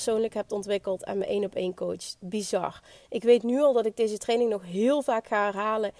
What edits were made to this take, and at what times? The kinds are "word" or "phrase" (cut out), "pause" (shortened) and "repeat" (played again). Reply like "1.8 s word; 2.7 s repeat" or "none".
none